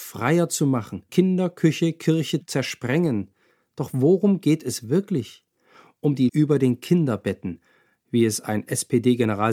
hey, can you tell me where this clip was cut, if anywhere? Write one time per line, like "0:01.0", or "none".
0:01.1
0:02.4
0:06.3

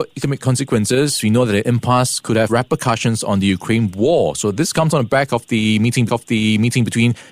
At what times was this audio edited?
0:02.5
0:06.1

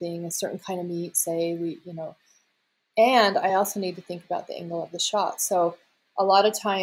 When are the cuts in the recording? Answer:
none

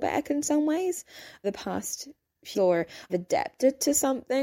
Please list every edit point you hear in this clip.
0:01.4
0:02.5
0:03.1

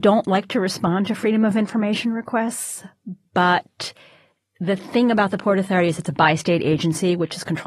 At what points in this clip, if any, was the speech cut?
none

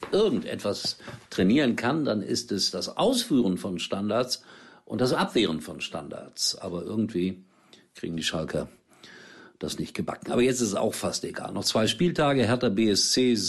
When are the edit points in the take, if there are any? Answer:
none

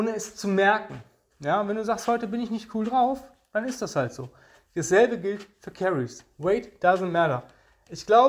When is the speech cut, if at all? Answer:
none

